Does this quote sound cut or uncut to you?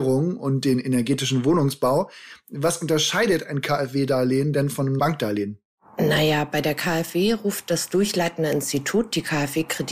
cut